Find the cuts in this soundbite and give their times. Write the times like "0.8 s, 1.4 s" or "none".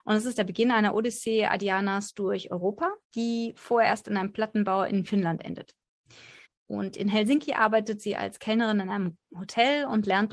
3.0 s, 6.4 s